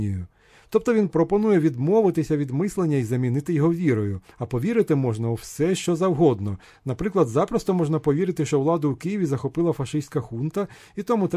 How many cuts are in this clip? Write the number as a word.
two